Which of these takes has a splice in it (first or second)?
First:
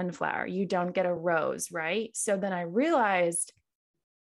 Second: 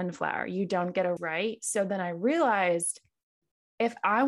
second